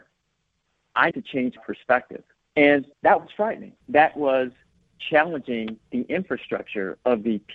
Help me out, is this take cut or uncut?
cut